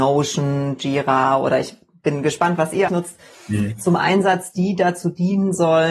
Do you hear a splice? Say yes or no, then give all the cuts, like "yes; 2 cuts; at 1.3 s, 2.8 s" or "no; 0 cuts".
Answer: yes; 1 cut; at 2.9 s